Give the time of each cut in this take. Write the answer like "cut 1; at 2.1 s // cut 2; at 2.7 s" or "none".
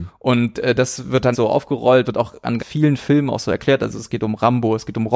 cut 1; at 1.3 s // cut 2; at 2.0 s // cut 3; at 2.6 s // cut 4; at 3.0 s